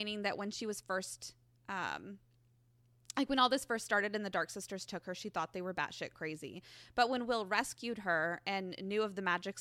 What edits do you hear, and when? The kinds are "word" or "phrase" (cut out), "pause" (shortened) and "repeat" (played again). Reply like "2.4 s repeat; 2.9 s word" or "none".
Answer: none